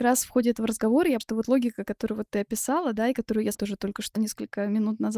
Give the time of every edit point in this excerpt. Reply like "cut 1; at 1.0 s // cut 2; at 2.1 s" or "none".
cut 1; at 1.2 s // cut 2; at 3.5 s // cut 3; at 4.2 s